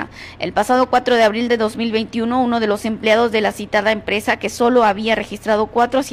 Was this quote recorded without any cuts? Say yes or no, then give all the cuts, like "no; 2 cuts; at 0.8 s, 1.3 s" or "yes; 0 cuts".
yes; 0 cuts